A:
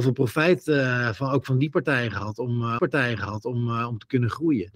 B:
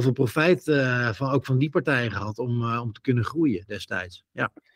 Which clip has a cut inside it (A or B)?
A